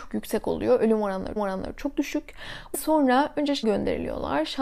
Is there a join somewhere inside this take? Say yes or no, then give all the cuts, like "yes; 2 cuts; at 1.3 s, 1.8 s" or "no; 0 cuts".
yes; 3 cuts; at 1.4 s, 2.7 s, 3.6 s